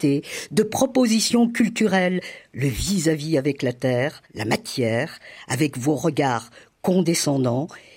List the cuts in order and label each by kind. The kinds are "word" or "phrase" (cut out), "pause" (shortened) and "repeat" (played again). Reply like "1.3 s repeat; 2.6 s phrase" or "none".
4.3 s pause